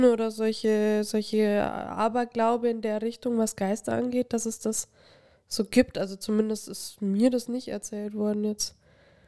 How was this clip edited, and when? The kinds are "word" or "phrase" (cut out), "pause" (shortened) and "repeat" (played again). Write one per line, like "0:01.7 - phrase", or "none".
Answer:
none